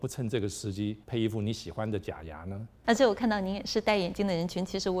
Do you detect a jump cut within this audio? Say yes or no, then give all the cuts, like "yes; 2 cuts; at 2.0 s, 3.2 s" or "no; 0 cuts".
yes; 1 cut; at 1.0 s